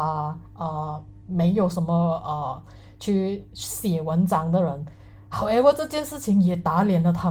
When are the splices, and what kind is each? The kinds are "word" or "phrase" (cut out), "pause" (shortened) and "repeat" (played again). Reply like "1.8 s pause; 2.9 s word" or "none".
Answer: none